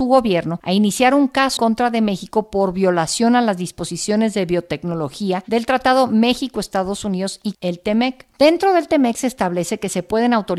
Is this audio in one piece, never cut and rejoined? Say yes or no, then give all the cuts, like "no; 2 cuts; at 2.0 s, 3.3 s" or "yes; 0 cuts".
no; 2 cuts; at 1.6 s, 7.5 s